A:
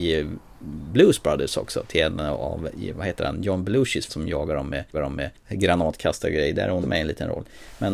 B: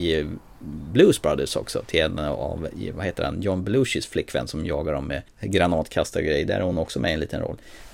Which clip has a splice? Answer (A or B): A